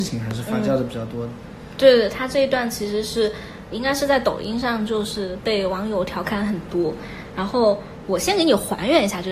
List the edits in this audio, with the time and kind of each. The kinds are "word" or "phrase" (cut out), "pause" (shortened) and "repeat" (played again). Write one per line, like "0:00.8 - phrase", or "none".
0:03.7 - word